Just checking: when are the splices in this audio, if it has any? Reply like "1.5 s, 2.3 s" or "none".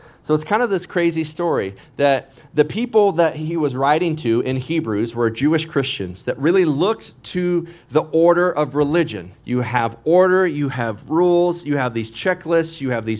9.3 s